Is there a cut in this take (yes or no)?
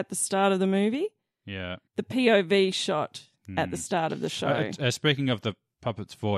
yes